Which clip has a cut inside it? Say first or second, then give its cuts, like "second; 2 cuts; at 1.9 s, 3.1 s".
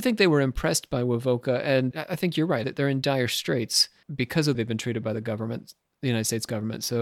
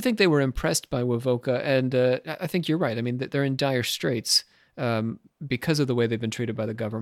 first; 4 cuts; at 1.9 s, 2.6 s, 4.0 s, 4.5 s